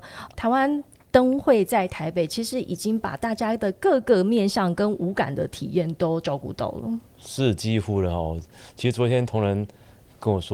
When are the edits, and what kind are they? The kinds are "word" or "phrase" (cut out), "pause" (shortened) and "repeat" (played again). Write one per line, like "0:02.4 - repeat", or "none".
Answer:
none